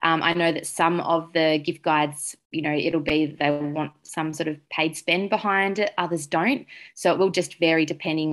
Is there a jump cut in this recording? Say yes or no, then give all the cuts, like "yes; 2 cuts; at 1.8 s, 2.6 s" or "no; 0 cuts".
no; 0 cuts